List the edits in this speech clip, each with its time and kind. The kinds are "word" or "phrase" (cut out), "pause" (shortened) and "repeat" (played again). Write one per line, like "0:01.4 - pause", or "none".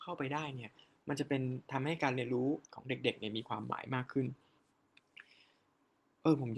0:02.6 - pause